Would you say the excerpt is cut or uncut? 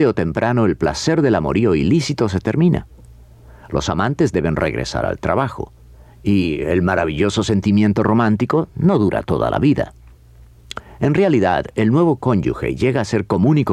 uncut